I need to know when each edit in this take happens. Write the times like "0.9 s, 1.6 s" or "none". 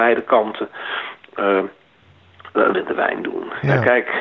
2.7 s